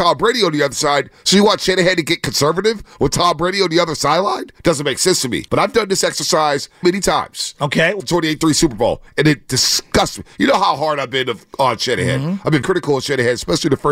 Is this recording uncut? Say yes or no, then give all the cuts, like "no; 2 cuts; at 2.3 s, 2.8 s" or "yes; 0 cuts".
no; 5 cuts; at 4.6 s, 5.5 s, 6.8 s, 8.0 s, 12.6 s